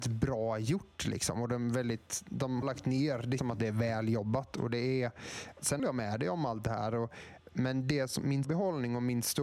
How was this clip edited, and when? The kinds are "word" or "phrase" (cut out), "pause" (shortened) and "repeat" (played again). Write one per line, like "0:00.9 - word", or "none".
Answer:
0:02.6 - word
0:03.4 - word
0:05.8 - word
0:08.4 - word

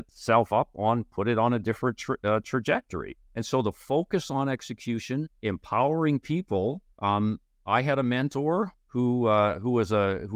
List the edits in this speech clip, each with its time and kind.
0:03.2 - pause
0:05.4 - pause
0:06.9 - pause
0:08.8 - pause

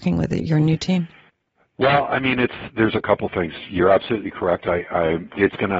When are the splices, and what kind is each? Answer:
none

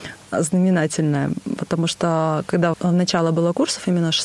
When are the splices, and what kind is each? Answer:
0:02.7 - word

